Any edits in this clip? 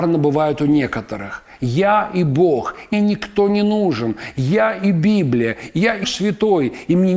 yes; 2 cuts; at 2.9 s, 6.0 s

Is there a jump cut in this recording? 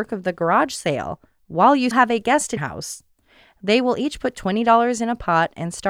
yes; 2 cuts; at 1.9 s, 2.6 s

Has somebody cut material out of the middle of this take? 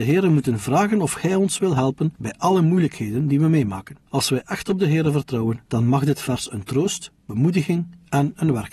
yes; 2 cuts; at 4.0 s, 5.6 s

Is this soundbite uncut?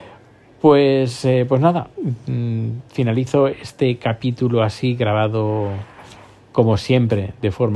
yes; 0 cuts

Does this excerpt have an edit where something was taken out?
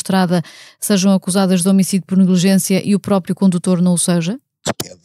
no; 0 cuts

